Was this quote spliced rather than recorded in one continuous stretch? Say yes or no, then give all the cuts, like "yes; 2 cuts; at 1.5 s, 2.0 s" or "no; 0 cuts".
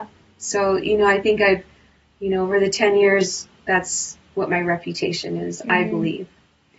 no; 0 cuts